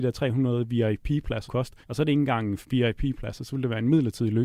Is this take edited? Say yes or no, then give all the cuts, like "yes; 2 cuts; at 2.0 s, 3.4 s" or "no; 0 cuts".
yes; 3 cuts; at 1.5 s, 1.8 s, 2.6 s